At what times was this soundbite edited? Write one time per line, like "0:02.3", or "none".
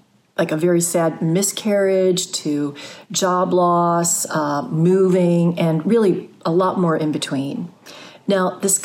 none